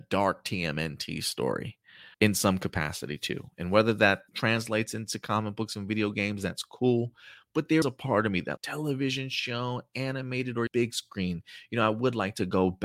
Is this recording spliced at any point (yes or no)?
yes